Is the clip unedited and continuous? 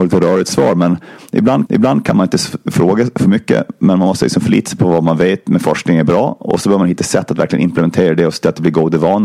no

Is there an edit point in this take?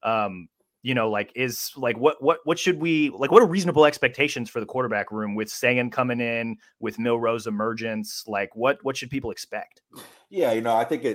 no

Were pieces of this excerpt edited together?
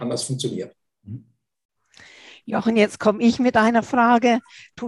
no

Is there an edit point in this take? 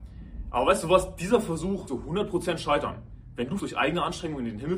yes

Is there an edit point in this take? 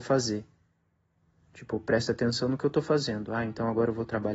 no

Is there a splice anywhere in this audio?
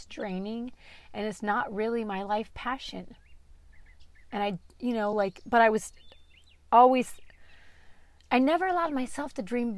no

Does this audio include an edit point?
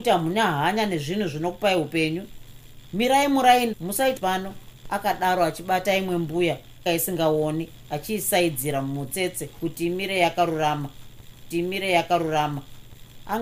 yes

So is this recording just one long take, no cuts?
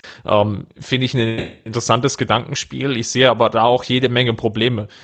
yes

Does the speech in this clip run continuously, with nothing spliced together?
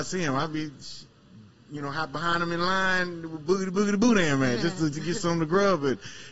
no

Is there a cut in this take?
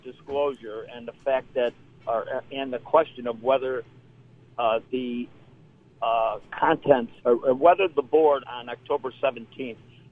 yes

